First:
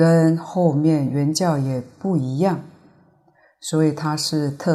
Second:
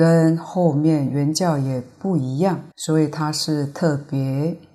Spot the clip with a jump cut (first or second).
second